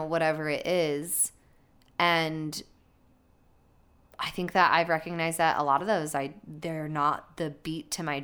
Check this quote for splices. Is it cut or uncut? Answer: uncut